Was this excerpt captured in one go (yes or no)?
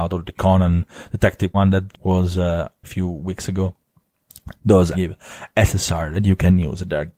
no